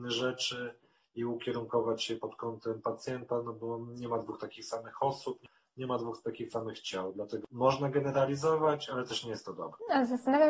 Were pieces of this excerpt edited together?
no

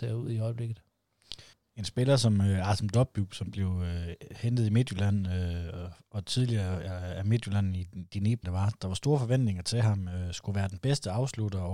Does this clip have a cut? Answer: yes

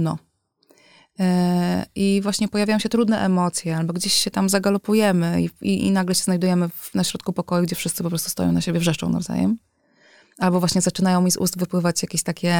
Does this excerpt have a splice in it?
no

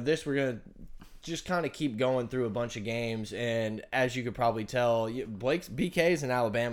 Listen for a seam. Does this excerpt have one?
no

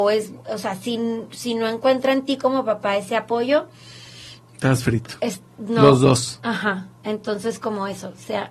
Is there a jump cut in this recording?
no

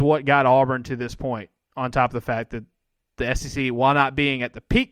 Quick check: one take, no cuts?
yes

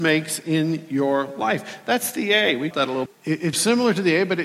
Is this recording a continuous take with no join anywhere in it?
no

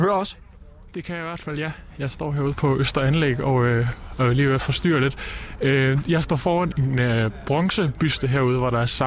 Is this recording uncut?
no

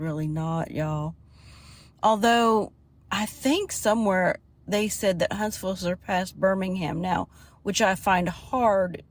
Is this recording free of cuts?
yes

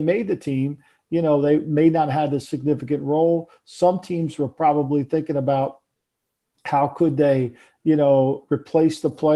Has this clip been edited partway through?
no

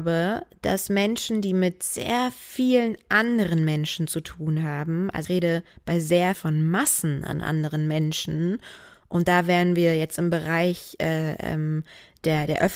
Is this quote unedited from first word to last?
no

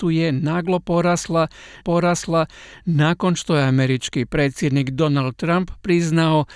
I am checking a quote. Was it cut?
yes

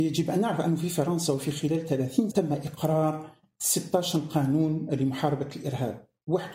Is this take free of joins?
no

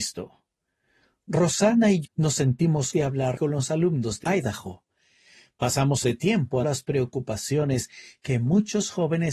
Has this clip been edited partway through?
yes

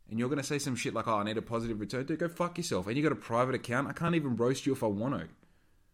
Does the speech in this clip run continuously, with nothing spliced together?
yes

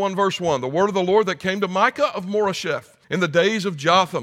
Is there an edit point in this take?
yes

